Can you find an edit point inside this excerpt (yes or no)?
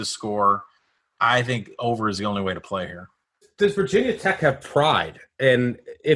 no